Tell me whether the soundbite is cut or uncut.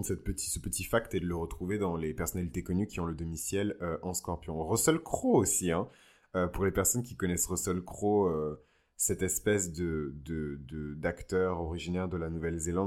uncut